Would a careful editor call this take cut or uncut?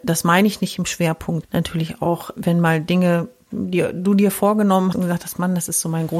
cut